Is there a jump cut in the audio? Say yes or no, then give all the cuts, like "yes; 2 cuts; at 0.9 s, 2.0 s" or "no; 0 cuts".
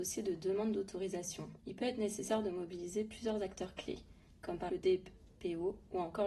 yes; 2 cuts; at 1.6 s, 4.7 s